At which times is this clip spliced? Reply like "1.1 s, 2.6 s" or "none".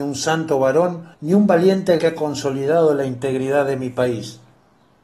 1.1 s, 2.0 s

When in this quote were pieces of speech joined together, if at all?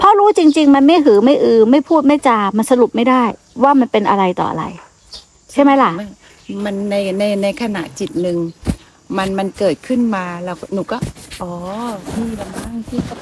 none

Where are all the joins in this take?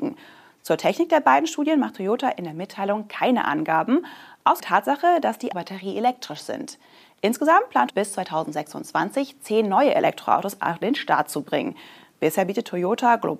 4.6 s, 5.5 s, 7.9 s

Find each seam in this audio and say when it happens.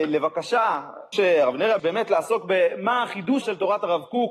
1.1 s, 1.8 s, 3.4 s

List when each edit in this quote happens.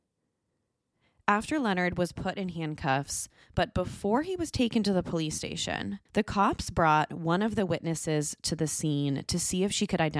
6.1 s

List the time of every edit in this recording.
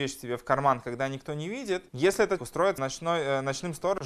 1.9 s, 2.4 s, 2.8 s

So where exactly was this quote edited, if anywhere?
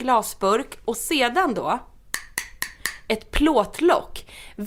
none

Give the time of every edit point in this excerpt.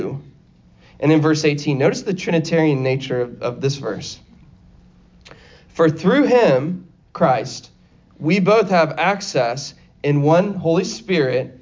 none

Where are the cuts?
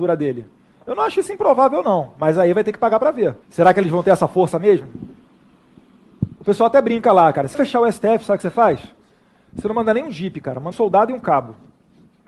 3.4 s, 6.4 s, 7.5 s, 10.7 s

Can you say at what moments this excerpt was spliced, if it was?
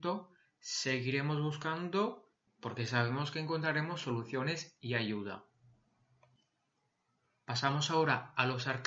none

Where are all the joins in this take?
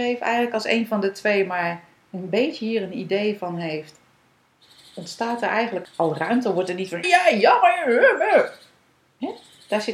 5.8 s, 7.0 s

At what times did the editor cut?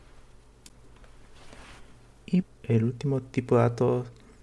2.4 s

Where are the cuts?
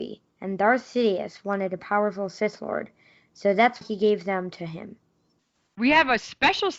3.8 s

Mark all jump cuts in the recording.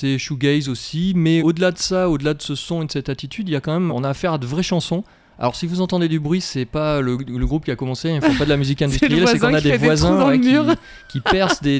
1.4 s, 3.9 s

